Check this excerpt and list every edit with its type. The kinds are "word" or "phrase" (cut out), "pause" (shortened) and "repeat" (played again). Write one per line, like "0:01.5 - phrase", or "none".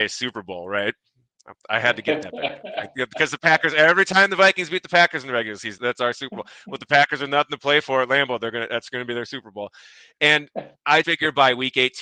0:05.8 - word
0:11.0 - word